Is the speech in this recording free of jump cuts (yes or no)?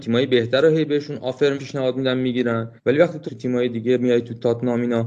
no